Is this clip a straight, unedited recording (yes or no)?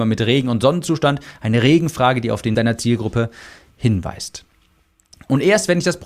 no